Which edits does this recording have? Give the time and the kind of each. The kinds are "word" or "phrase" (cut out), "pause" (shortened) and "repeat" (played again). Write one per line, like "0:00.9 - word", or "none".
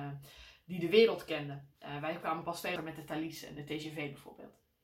0:02.8 - word